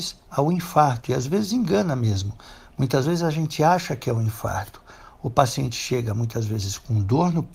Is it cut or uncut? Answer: uncut